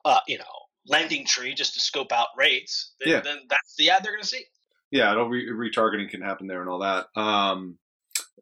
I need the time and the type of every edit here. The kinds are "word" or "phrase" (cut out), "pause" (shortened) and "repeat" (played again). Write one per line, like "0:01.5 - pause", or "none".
none